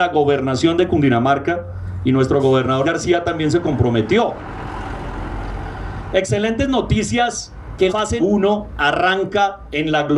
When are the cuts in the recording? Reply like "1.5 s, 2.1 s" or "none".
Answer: 2.8 s, 7.9 s, 8.2 s